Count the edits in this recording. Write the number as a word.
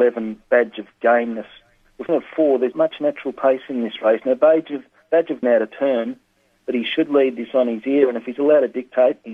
three